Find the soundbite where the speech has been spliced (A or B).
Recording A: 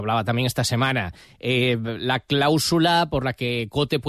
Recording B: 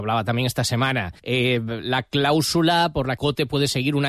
B